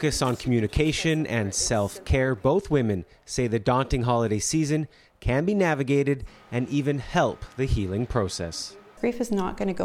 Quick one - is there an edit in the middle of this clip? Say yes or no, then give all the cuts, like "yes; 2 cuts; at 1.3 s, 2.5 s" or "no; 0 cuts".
no; 0 cuts